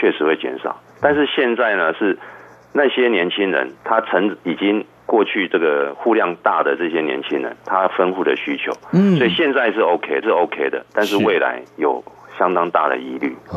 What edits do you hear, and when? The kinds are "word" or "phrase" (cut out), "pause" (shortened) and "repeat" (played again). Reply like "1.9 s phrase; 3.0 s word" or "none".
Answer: 3.8 s pause; 10.2 s repeat